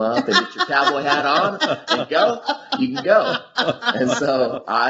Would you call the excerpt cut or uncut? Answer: uncut